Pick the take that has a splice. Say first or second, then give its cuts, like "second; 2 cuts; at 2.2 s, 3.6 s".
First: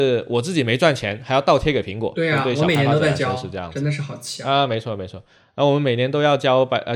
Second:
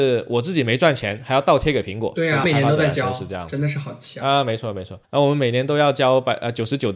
second; 2 cuts; at 2.4 s, 5.0 s